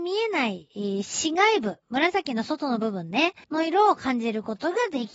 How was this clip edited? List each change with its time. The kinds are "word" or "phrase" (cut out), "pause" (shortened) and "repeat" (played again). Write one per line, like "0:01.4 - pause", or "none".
0:01.8 - pause
0:03.4 - pause